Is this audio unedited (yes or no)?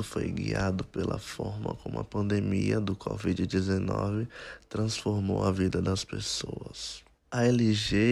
no